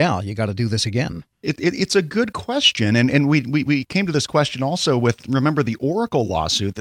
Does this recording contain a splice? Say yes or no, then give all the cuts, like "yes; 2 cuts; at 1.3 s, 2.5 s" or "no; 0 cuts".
yes; 1 cut; at 1.3 s